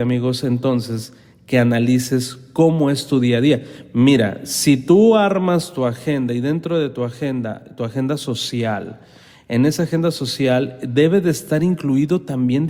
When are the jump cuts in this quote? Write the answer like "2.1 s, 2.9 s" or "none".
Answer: none